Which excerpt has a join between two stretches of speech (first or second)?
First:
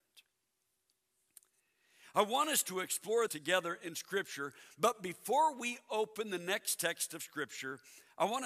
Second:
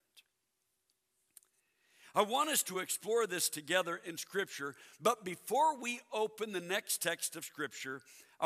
first